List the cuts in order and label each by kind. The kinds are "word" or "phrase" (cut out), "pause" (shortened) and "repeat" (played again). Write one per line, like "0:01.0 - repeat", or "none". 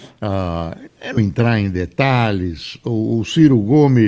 0:01.2 - word